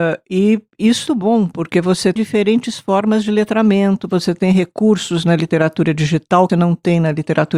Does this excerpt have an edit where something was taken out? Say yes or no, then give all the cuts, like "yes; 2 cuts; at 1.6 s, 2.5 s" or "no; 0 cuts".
yes; 3 cuts; at 1.1 s, 2.2 s, 6.5 s